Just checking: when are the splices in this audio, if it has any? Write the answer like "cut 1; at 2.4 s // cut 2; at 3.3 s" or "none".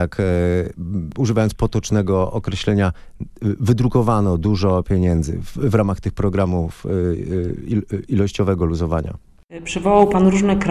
none

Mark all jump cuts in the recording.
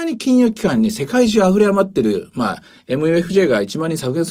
none

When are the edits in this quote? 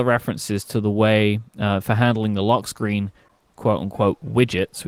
none

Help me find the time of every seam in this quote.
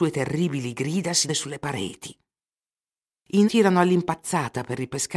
cut 1; at 1.3 s // cut 2; at 3.4 s

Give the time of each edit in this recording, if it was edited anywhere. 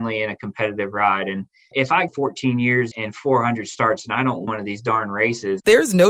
cut 1; at 1.7 s // cut 2; at 2.1 s // cut 3; at 2.9 s // cut 4; at 4.5 s

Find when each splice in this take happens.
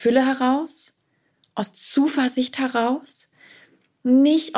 cut 1; at 1.7 s

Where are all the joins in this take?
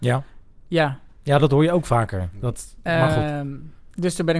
none

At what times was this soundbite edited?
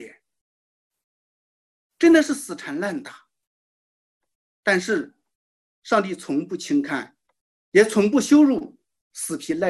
cut 1; at 7.3 s

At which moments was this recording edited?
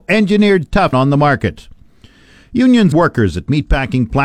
cut 1; at 0.9 s // cut 2; at 2.9 s

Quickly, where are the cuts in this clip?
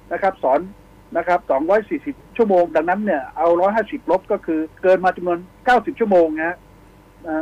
cut 1; at 1.4 s // cut 2; at 4.7 s

